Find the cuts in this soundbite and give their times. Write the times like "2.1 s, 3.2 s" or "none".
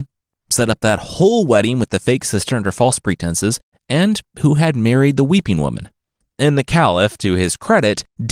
none